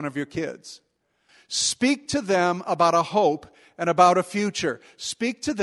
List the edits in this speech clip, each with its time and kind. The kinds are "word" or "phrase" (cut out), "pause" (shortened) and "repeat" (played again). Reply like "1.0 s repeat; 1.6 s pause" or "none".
none